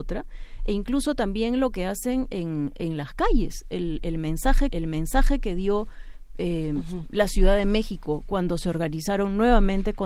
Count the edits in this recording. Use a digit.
1